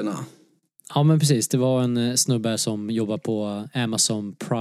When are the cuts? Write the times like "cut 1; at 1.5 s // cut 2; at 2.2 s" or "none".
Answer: none